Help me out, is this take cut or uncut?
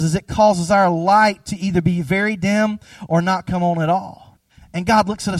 cut